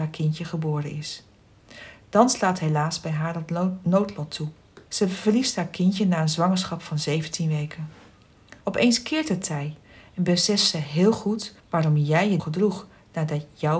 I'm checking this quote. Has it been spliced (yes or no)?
yes